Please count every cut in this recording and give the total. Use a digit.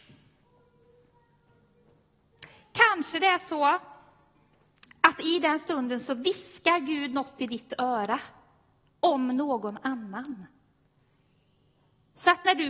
0